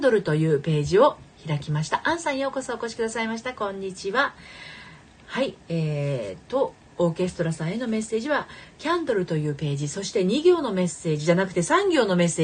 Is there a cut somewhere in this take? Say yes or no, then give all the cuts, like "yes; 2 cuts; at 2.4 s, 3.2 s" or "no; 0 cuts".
no; 0 cuts